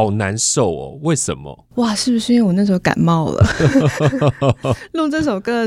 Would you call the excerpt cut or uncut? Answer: cut